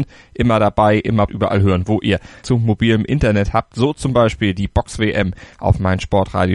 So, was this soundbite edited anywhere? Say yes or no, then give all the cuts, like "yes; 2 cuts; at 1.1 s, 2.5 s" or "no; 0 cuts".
yes; 2 cuts; at 1.3 s, 2.4 s